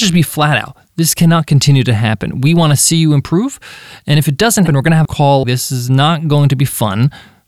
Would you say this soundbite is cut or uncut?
cut